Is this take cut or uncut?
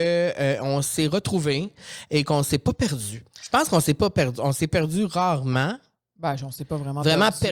uncut